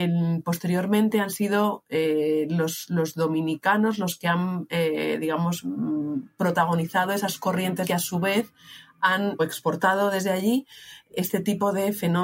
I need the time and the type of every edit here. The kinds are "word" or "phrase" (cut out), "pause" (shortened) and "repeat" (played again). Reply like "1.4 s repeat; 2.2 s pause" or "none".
7.8 s word